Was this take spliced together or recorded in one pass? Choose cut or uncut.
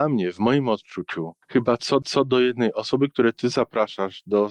cut